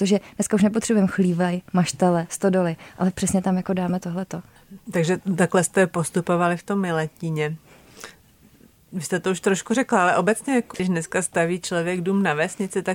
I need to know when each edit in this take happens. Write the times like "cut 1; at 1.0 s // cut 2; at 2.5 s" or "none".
none